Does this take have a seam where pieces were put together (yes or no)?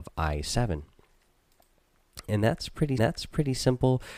yes